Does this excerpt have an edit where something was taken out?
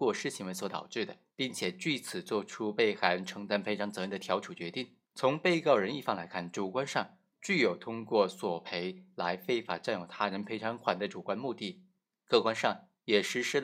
yes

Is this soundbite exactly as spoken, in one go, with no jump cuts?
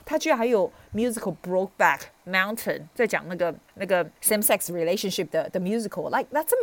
no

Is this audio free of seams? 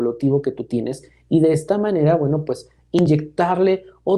yes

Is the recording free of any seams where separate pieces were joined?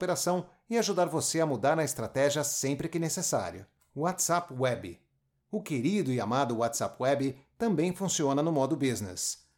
yes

